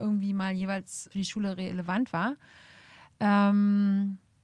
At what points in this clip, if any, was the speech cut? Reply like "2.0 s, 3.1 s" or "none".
1.1 s